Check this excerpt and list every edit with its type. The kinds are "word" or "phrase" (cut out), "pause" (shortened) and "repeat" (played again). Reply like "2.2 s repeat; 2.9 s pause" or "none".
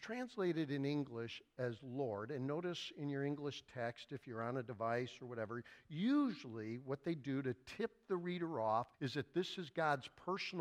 8.9 s pause

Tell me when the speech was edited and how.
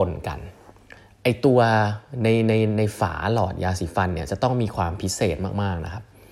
1.0 s pause

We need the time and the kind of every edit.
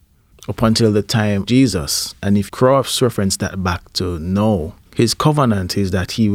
1.5 s word; 2.5 s word; 4.8 s pause

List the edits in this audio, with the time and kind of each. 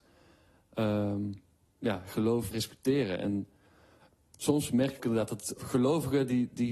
2.5 s word; 4.2 s word; 5.0 s word; 5.6 s word

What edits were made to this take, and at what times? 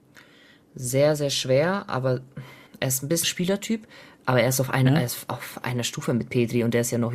2.7 s pause; 3.2 s word; 5.6 s word

